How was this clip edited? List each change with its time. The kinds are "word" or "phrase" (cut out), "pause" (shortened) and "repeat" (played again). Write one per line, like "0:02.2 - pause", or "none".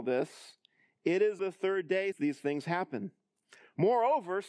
0:01.4 - word
0:02.1 - word

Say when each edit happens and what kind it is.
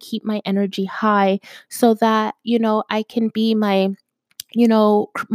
none

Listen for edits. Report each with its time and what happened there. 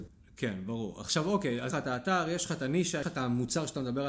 0:01.7 - phrase
0:03.0 - word

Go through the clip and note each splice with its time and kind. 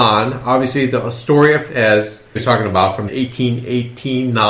0:01.7 - word
0:02.4 - word
0:03.1 - word

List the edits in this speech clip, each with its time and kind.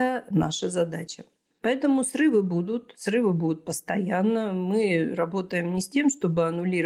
none

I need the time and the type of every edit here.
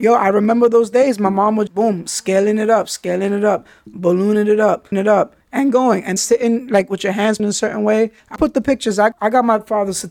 0:01.7 - word
0:04.9 - word
0:06.2 - word
0:07.4 - word
0:08.4 - word
0:09.1 - word

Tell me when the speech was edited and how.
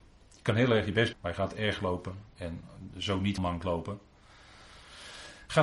0:01.1 - word
0:01.8 - word
0:03.4 - word

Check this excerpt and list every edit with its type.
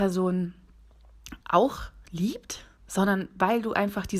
0:01.4 - pause

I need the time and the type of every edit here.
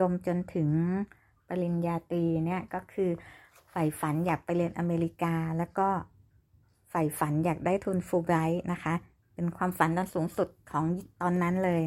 none

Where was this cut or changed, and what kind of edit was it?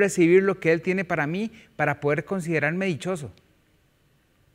none

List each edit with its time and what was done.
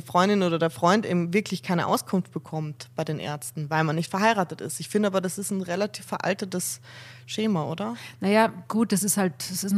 none

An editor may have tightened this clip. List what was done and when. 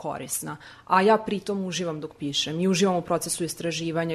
none

